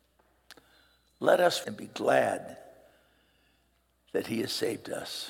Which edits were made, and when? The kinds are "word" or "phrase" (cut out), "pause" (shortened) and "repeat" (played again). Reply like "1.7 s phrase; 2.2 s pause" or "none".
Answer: 1.6 s word